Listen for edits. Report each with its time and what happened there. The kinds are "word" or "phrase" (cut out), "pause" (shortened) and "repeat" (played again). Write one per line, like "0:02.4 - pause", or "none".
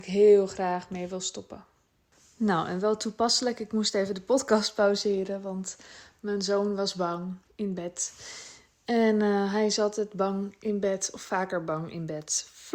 none